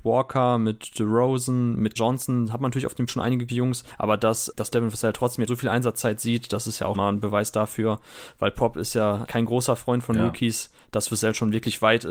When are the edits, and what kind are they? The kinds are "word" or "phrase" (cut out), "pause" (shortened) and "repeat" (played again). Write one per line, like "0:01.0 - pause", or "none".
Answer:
0:02.0 - word
0:03.1 - word
0:03.5 - word
0:04.5 - word
0:05.5 - word
0:06.9 - word
0:09.3 - word